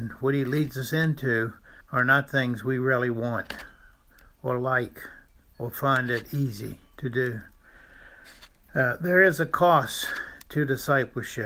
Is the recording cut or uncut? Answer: cut